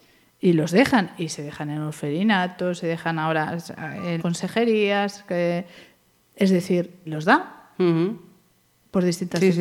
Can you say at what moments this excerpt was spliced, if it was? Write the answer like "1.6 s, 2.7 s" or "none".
4.2 s, 7.1 s